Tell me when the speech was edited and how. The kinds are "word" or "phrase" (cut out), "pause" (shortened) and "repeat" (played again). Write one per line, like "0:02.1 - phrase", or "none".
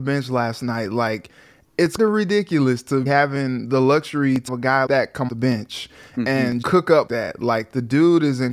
0:02.0 - word
0:03.1 - word
0:04.5 - word
0:04.9 - word
0:05.3 - word
0:06.6 - word
0:07.1 - word